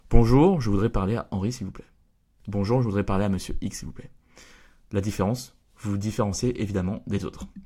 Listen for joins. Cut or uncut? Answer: uncut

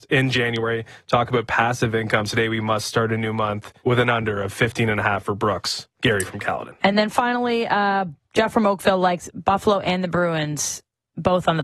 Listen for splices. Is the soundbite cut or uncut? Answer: cut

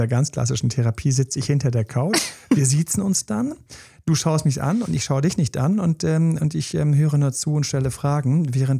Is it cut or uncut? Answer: uncut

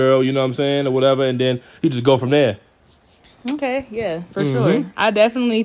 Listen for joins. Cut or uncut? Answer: uncut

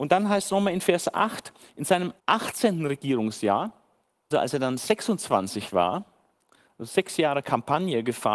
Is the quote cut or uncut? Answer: cut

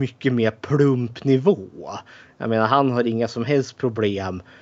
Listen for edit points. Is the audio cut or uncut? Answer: uncut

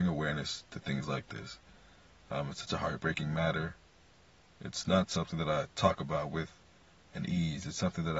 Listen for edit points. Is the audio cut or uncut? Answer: uncut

